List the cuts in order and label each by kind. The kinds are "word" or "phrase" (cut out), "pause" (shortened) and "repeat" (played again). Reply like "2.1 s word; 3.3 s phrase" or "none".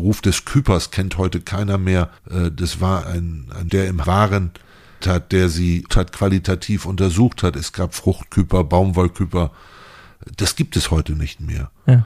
2.2 s pause; 3.0 s word; 3.7 s word; 4.0 s word; 5.0 s word; 5.9 s word